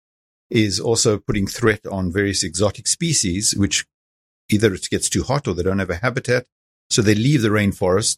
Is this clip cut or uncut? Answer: uncut